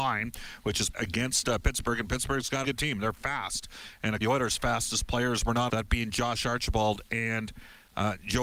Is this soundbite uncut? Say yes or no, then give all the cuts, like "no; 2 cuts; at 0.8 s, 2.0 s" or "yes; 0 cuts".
no; 4 cuts; at 0.9 s, 2.6 s, 4.2 s, 5.7 s